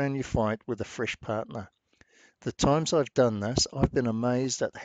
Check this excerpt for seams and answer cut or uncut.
uncut